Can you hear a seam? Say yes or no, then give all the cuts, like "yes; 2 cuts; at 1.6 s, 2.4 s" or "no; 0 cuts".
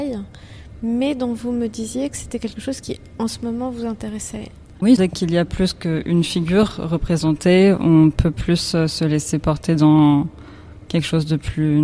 no; 0 cuts